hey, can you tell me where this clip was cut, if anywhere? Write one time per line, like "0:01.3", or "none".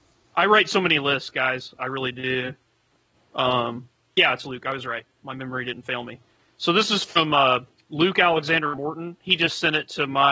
none

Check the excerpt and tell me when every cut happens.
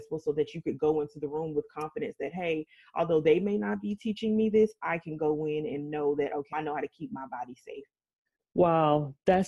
0:06.5

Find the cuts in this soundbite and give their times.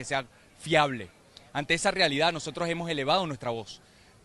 none

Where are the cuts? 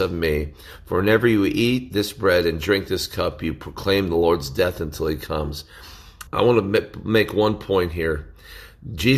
0:06.3

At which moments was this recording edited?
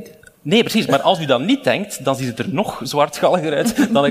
none

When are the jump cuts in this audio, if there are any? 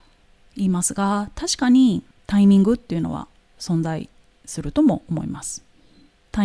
0:02.1

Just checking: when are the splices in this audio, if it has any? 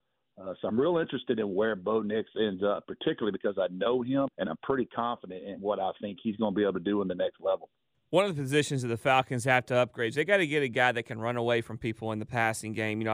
0:04.3
0:07.9

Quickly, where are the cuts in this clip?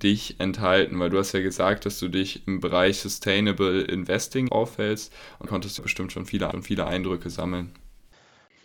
0:04.5
0:05.5
0:05.8
0:06.5

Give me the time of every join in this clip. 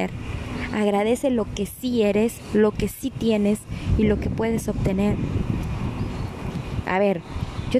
none

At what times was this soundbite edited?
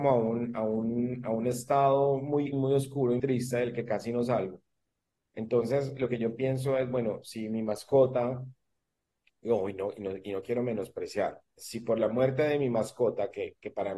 0:02.5
0:03.2
0:11.6

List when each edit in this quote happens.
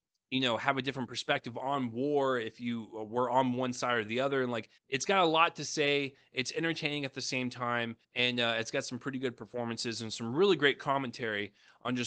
0:04.8
0:08.0

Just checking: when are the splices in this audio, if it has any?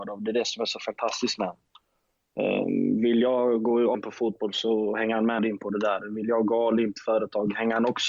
0:03.9
0:05.4
0:06.9

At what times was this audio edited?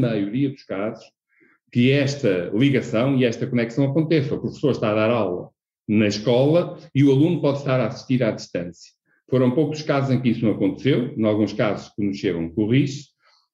none

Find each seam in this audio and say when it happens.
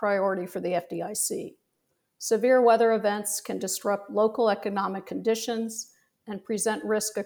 none

